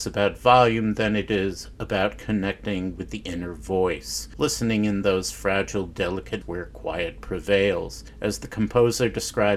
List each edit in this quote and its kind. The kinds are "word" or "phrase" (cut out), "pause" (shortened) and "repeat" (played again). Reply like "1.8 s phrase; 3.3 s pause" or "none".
6.4 s word